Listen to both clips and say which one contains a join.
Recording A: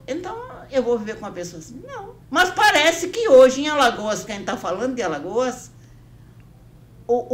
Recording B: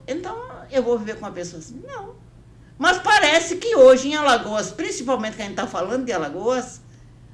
A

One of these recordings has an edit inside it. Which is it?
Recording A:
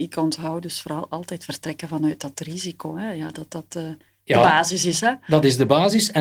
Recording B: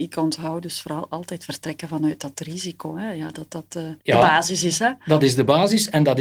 B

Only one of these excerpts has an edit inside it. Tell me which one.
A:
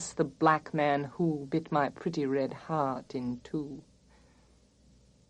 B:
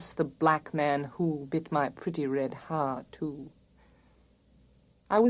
B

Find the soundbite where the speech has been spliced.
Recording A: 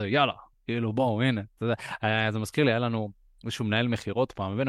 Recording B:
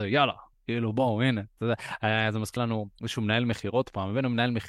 B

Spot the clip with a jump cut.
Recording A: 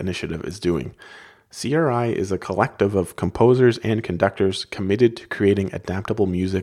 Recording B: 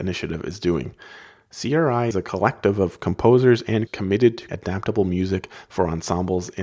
B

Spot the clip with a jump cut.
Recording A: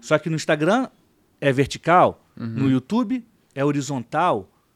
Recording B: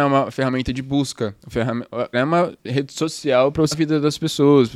B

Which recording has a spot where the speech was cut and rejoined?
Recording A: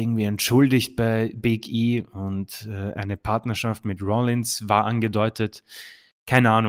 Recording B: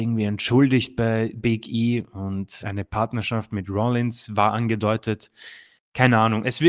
B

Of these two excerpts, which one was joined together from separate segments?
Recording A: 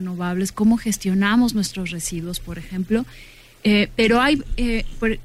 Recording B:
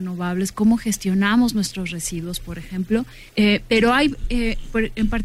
B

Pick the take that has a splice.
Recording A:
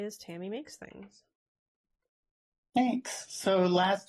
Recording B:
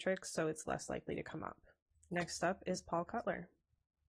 B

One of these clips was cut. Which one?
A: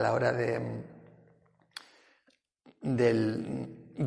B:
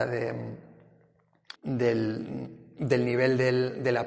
B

